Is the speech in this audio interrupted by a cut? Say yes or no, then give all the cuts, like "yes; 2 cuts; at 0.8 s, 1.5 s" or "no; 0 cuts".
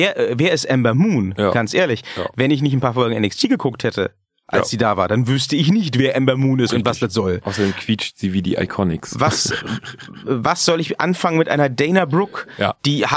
no; 0 cuts